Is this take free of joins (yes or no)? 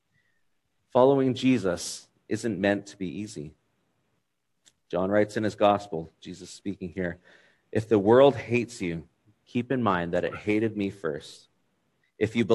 yes